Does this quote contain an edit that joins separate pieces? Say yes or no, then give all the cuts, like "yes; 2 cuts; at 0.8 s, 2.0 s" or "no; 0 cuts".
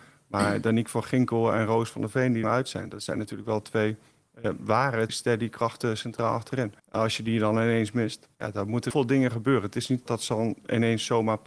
yes; 6 cuts; at 2.4 s, 5.1 s, 6.8 s, 8.3 s, 8.9 s, 10.1 s